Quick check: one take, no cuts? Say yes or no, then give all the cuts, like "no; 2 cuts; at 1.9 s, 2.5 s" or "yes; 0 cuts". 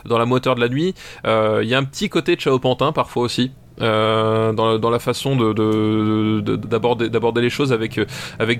yes; 0 cuts